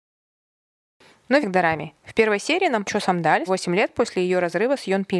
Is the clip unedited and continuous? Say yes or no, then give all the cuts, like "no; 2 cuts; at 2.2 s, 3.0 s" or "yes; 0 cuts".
no; 3 cuts; at 1.4 s, 2.8 s, 3.5 s